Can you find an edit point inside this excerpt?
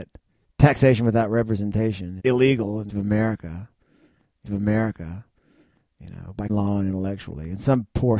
yes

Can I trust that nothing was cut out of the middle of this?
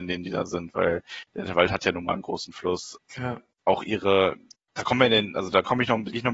no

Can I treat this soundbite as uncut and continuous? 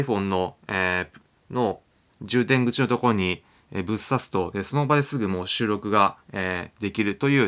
yes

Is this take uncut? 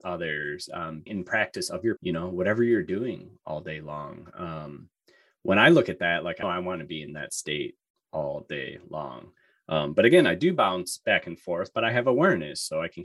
no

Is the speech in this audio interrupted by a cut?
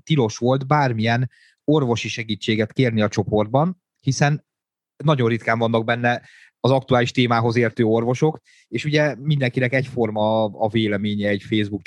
no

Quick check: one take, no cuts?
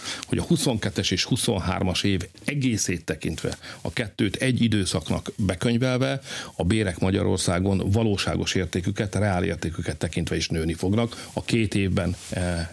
yes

